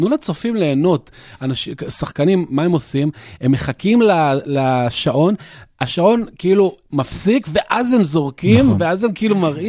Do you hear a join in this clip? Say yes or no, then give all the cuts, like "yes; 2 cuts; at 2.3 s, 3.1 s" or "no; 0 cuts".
no; 0 cuts